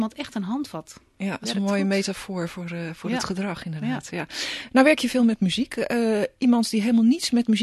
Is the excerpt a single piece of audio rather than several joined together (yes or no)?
yes